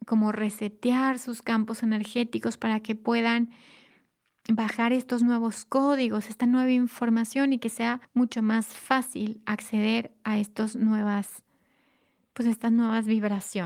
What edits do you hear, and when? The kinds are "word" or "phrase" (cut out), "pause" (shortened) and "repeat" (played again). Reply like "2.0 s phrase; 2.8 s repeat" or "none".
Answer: 8.0 s pause

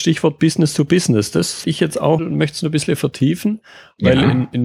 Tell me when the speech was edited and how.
1.6 s word; 2.2 s word

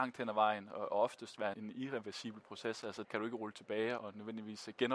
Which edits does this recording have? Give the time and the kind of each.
1.5 s word; 3.0 s word; 4.0 s word

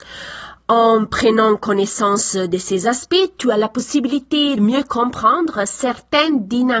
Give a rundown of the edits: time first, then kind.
4.6 s word

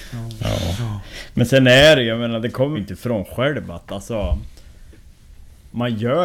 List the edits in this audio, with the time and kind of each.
2.7 s word

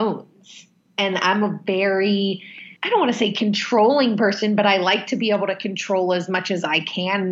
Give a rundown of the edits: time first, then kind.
2.8 s pause

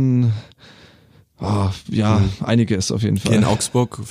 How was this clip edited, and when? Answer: none

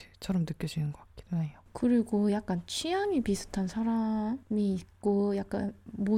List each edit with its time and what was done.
none

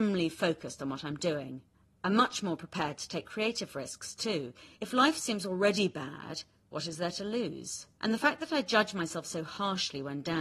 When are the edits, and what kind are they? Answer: 1.7 s pause; 4.7 s pause; 8.0 s pause

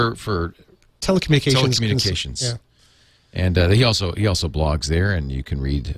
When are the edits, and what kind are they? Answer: none

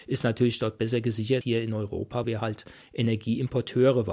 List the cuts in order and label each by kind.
1.4 s word; 2.2 s word

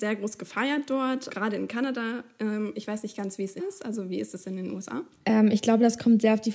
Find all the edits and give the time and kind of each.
1.3 s word; 3.6 s phrase

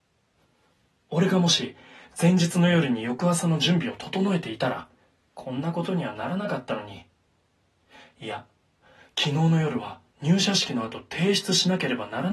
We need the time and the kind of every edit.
none

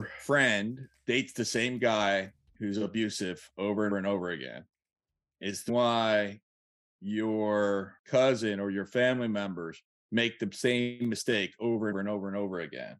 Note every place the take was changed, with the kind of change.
3.9 s word; 5.7 s word; 11.9 s word

